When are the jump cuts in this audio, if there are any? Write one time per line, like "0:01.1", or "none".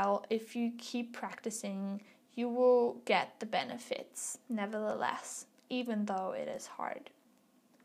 none